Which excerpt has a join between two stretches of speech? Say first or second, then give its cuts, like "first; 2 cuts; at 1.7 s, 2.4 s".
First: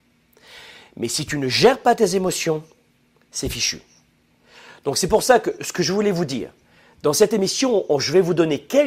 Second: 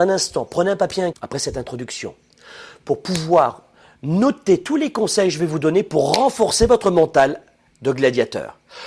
second; 1 cut; at 1.1 s